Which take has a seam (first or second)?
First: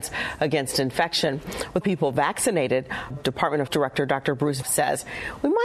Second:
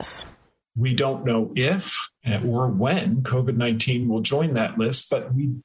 first